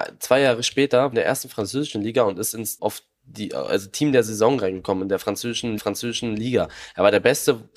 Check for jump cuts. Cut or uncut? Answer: cut